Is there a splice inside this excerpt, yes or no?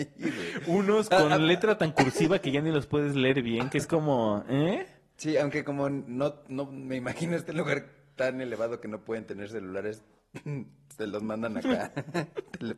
no